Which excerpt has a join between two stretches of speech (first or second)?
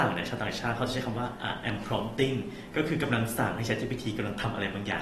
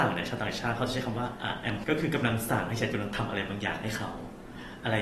second